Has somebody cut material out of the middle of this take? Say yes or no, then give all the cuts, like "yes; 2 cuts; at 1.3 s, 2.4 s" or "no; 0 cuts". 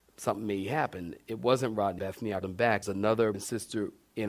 yes; 4 cuts; at 2.0 s, 2.4 s, 2.8 s, 3.3 s